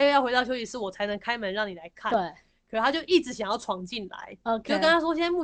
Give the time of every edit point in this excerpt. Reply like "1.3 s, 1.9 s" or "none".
none